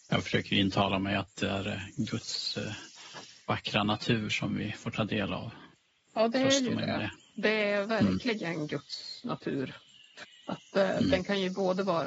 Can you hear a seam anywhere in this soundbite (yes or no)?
no